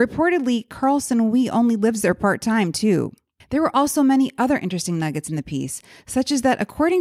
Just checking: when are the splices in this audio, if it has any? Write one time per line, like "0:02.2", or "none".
none